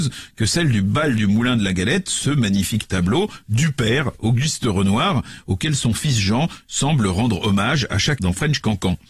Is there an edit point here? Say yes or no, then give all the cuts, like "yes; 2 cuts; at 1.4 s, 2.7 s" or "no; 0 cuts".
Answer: yes; 1 cut; at 8.2 s